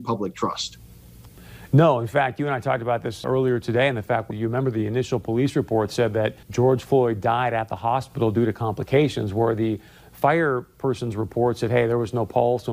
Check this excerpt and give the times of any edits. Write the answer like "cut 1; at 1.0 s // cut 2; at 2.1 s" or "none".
cut 1; at 3.2 s // cut 2; at 4.3 s // cut 3; at 6.4 s